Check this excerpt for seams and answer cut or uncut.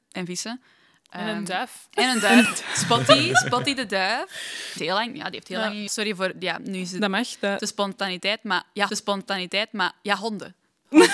cut